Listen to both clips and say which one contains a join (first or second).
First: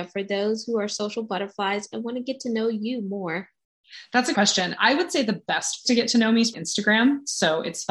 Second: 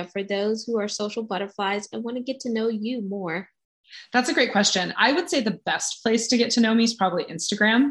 first